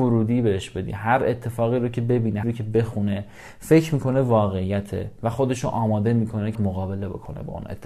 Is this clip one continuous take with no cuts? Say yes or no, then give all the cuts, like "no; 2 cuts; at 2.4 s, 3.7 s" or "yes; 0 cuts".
no; 2 cuts; at 2.4 s, 6.5 s